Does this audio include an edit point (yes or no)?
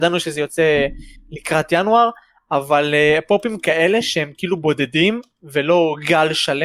no